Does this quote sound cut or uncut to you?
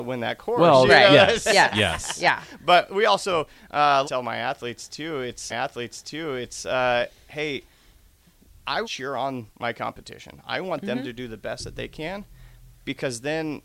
cut